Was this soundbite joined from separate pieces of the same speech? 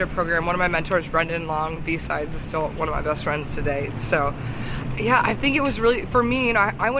no; 0 cuts

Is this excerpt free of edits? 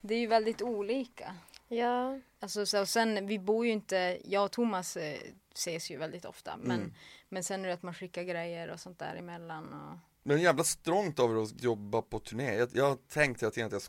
yes; 0 cuts

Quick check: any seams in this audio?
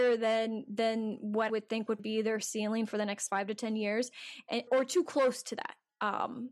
yes; 4 cuts; at 1.5 s, 2.0 s, 3.3 s, 4.7 s

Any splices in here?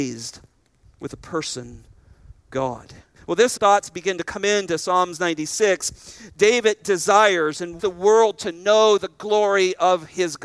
yes; 4 cuts; at 2.5 s, 3.2 s, 3.6 s, 7.8 s

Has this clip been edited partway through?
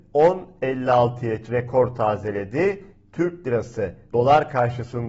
yes; 2 cuts; at 1.4 s, 4.1 s

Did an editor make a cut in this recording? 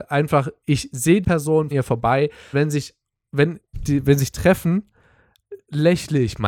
yes; 5 cuts; at 1.2 s, 1.7 s, 2.5 s, 3.7 s, 4.3 s

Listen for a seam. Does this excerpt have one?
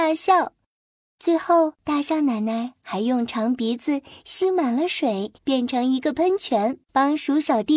yes; 3 cuts; at 1.8 s, 5.3 s, 6.8 s

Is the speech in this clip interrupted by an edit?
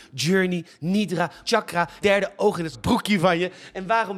yes; 3 cuts; at 1.4 s, 2.0 s, 2.7 s

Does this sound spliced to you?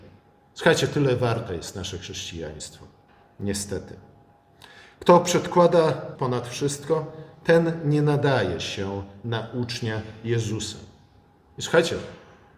yes; 2 cuts; at 3.1 s, 6.1 s

